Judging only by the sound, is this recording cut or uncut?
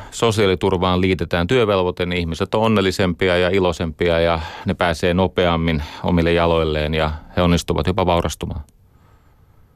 uncut